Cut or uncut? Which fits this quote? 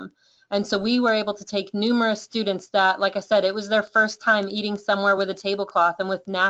uncut